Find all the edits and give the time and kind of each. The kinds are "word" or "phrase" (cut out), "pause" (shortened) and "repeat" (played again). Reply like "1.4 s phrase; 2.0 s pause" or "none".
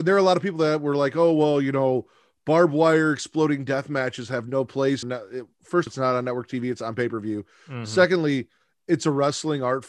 5.0 s word; 5.9 s word